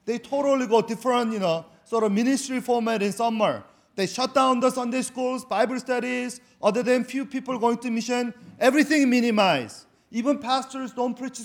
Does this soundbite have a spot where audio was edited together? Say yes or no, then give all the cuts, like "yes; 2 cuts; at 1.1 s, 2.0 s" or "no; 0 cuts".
no; 0 cuts